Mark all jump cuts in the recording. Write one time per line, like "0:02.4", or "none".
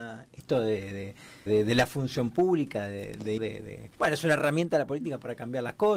0:01.5
0:03.4
0:03.9